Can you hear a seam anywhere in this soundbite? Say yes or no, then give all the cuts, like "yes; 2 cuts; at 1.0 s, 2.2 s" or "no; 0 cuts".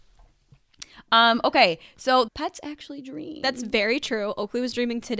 no; 0 cuts